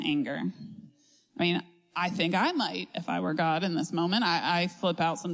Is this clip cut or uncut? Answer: uncut